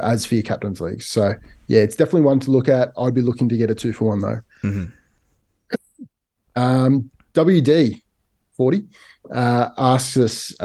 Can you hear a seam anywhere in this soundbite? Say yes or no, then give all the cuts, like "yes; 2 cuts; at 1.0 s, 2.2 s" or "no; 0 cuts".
no; 0 cuts